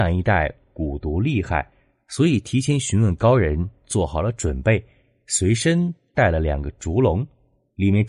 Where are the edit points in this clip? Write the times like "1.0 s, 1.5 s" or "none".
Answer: none